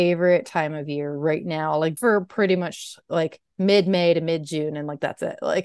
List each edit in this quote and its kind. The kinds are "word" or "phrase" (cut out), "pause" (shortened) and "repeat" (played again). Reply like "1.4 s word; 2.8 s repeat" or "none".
2.0 s word